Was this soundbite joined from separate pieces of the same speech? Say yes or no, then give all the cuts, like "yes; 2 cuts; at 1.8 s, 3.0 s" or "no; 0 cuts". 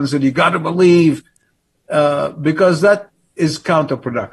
no; 0 cuts